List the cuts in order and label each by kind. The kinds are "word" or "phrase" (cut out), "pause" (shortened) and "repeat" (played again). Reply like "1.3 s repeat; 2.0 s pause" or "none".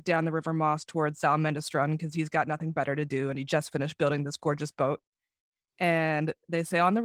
none